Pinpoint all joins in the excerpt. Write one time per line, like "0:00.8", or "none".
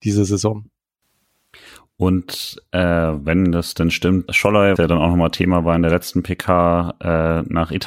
0:04.3
0:04.8